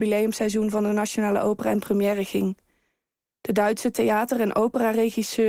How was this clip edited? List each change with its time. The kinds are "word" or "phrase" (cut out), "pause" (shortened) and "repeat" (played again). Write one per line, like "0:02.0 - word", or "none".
none